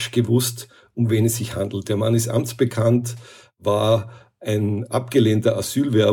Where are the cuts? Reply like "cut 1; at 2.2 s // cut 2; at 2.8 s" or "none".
none